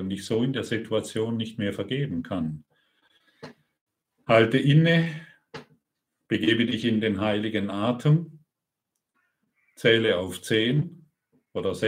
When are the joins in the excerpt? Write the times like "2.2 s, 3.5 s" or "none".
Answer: none